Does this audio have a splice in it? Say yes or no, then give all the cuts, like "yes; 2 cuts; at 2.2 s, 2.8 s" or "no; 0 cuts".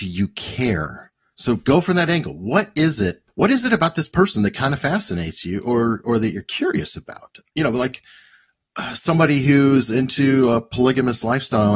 yes; 1 cut; at 3.3 s